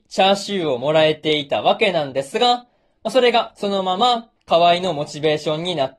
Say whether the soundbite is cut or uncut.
uncut